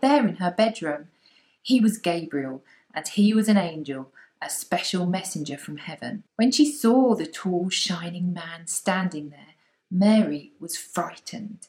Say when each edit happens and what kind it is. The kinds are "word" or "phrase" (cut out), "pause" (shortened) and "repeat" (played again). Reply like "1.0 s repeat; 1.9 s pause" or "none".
6.3 s pause